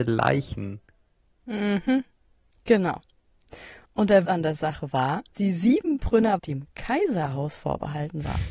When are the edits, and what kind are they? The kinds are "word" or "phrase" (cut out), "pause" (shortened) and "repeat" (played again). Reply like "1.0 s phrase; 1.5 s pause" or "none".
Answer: 4.2 s word; 5.3 s word; 6.4 s word